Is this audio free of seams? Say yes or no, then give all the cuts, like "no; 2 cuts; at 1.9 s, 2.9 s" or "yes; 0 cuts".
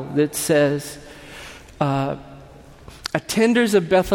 yes; 0 cuts